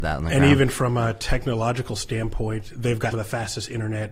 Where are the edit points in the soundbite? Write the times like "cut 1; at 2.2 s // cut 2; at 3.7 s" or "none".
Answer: cut 1; at 3.1 s